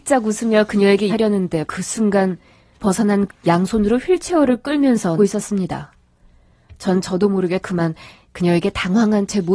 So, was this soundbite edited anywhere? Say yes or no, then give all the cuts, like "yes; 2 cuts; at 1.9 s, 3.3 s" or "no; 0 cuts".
yes; 6 cuts; at 1.1 s, 1.6 s, 2.8 s, 3.3 s, 5.2 s, 7.6 s